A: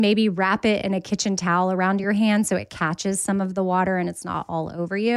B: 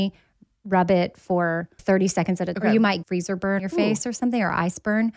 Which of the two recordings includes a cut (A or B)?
B